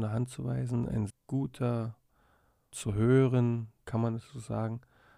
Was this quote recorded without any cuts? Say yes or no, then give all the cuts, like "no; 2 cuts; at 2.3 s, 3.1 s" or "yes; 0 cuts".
no; 3 cuts; at 1.1 s, 2.7 s, 3.8 s